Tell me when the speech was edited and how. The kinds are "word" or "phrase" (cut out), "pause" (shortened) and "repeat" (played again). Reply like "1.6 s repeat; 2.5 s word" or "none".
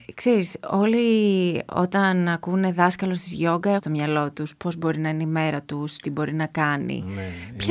3.8 s phrase